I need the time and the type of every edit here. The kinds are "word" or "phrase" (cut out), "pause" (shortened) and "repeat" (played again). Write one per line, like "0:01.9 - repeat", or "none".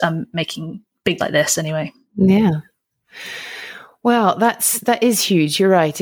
0:01.2 - word